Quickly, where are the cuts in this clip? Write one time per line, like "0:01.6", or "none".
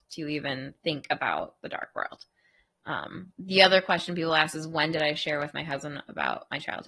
0:03.3